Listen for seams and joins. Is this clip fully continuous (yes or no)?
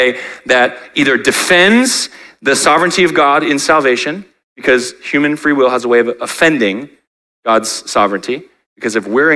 yes